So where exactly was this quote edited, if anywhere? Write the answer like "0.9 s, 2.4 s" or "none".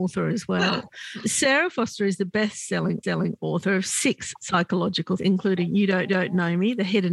3.0 s, 5.2 s, 6.1 s